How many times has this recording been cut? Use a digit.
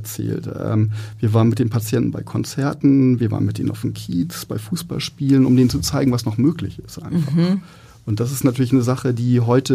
0